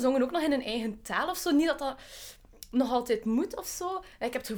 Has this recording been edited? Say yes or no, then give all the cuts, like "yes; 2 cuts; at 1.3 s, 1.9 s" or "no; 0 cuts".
no; 0 cuts